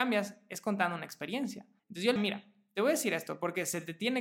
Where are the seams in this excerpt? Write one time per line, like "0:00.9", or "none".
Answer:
0:01.8
0:02.2